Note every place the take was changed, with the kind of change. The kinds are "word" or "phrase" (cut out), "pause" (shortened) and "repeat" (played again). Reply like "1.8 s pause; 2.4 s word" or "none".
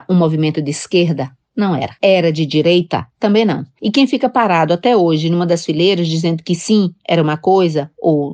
none